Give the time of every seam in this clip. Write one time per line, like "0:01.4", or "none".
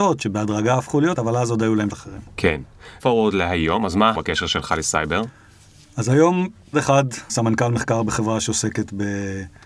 0:01.2
0:01.9
0:03.0
0:04.1
0:06.7
0:07.3

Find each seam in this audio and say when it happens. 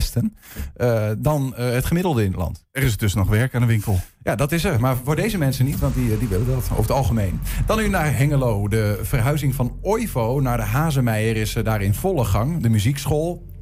none

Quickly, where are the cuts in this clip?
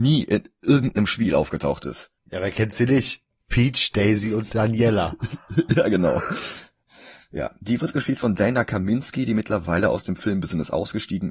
0:02.2

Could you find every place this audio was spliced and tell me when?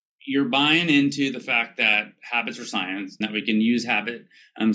0:03.2

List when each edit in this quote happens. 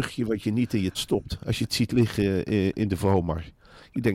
0:00.9

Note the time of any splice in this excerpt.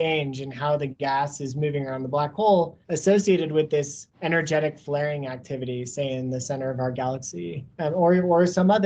0:02.8
0:04.1
0:07.7

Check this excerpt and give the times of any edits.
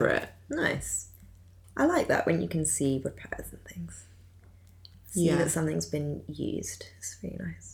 none

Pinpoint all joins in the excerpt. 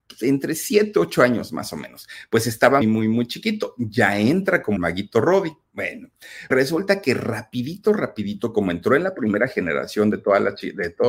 0:02.8
0:04.8
0:06.5

